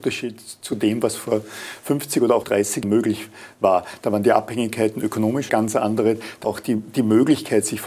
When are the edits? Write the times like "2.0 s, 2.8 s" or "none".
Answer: 2.4 s, 2.8 s, 5.5 s, 6.4 s